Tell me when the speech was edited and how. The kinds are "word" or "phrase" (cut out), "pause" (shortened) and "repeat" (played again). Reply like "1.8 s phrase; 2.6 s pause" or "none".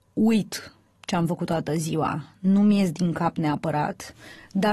none